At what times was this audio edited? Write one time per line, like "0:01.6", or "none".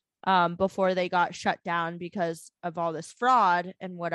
none